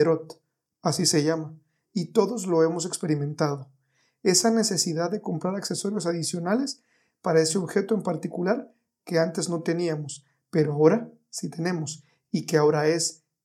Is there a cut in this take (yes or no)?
no